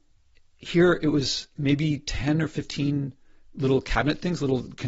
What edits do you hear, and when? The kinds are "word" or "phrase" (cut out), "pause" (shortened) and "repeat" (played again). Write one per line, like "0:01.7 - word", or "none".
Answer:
none

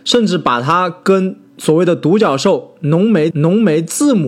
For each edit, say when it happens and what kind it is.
0:03.3 - repeat

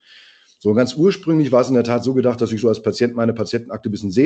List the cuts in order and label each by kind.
none

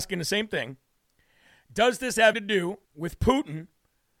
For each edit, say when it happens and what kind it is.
0:02.3 - word
0:02.8 - pause

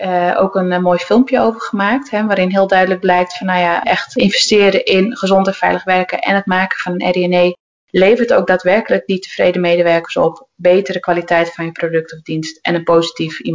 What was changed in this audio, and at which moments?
none

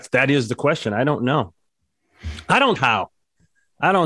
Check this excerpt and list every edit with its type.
0:02.8 - word

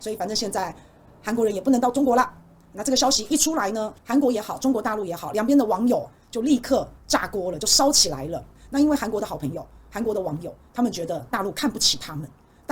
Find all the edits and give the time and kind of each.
0:04.0 - pause

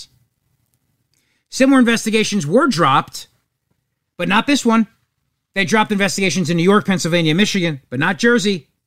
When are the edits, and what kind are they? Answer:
0:05.2 - pause

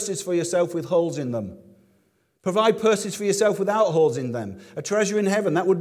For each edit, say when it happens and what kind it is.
none

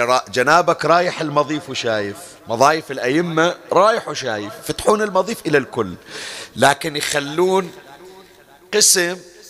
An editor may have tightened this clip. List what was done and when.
0:02.4 - pause

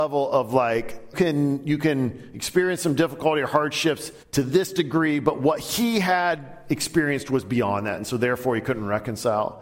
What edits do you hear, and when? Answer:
0:01.1 - phrase
0:04.2 - pause

